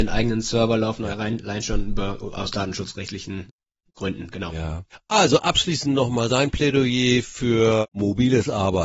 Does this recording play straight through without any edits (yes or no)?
yes